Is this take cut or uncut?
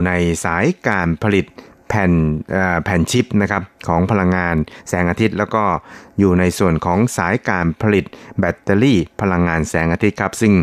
uncut